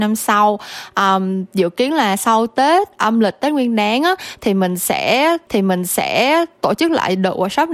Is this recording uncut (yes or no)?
no